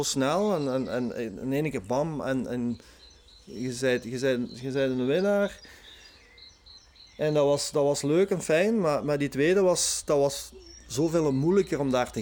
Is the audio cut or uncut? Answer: uncut